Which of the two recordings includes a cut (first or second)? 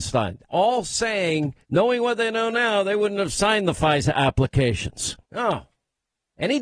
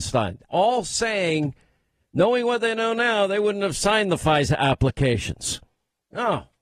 first